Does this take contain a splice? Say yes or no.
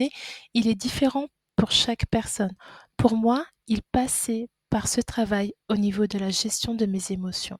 no